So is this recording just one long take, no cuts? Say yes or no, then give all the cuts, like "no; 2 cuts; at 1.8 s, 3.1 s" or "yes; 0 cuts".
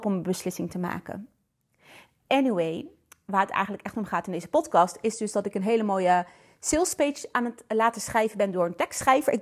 yes; 0 cuts